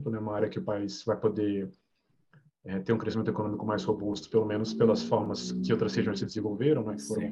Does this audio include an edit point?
no; 0 cuts

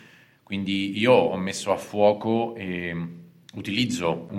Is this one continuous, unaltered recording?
yes; 0 cuts

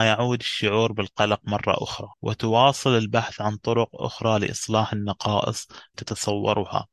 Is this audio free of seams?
no; 2 cuts; at 2.1 s, 5.9 s

